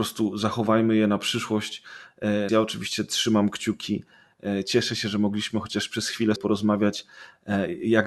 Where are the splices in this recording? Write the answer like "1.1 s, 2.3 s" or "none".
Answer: 2.5 s, 6.4 s